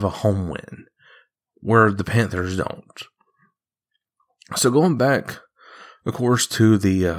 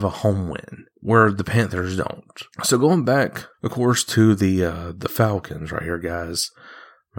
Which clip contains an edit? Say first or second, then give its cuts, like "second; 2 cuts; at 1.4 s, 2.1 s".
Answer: second; 3 cuts; at 0.9 s, 2.5 s, 3.5 s